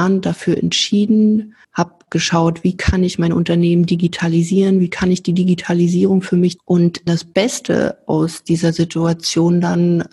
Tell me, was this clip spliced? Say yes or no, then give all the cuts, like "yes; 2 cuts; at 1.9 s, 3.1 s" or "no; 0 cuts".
yes; 3 cuts; at 1.6 s, 6.6 s, 7.1 s